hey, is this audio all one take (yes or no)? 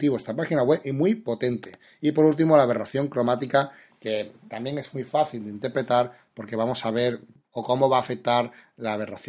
yes